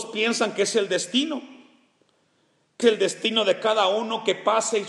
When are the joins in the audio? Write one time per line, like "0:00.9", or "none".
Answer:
0:02.8